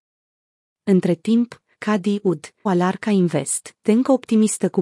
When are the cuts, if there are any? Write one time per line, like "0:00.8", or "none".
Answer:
0:02.7
0:03.8